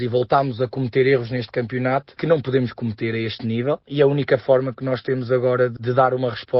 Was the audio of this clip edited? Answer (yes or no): no